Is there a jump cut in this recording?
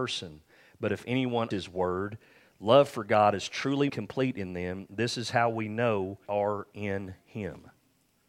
yes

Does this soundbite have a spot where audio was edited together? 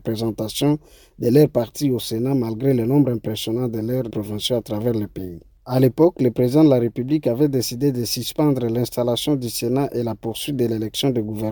yes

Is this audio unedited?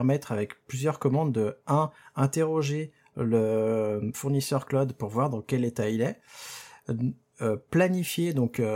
yes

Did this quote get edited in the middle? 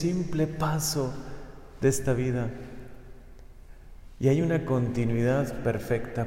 no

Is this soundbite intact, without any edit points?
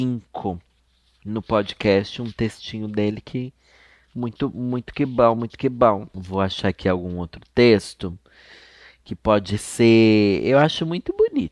yes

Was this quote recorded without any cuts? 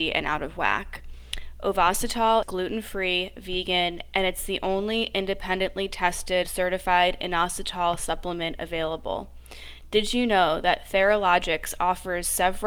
no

